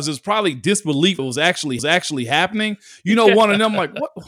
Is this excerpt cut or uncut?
cut